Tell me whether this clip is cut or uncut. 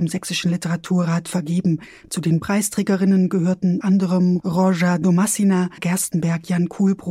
cut